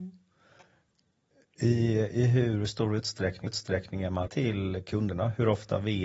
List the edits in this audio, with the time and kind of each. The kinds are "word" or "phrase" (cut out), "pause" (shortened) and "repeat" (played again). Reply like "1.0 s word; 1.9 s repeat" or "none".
3.5 s repeat; 4.3 s word